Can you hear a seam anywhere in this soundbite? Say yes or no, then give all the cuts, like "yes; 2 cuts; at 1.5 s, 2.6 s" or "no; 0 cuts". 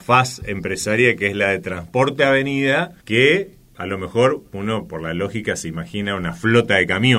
yes; 1 cut; at 3.0 s